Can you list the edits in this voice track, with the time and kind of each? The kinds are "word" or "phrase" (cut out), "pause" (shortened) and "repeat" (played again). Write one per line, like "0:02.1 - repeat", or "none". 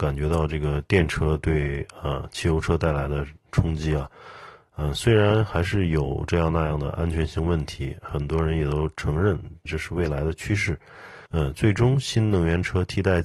0:09.6 - word
0:11.3 - pause